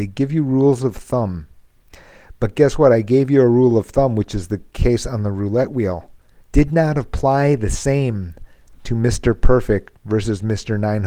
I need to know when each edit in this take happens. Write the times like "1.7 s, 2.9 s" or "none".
6.4 s, 10.0 s